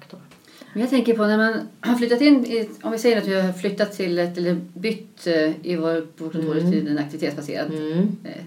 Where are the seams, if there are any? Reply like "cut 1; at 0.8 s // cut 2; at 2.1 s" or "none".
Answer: none